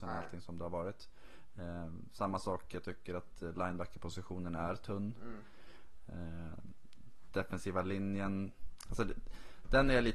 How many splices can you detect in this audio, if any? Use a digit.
0